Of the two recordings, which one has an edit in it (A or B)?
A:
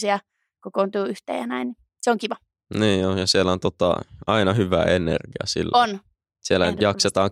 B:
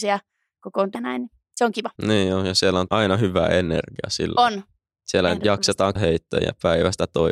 B